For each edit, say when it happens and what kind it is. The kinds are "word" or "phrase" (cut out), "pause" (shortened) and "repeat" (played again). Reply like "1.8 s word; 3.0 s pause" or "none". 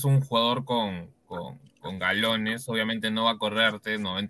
none